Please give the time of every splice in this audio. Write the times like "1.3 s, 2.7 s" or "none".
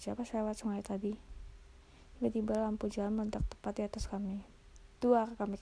none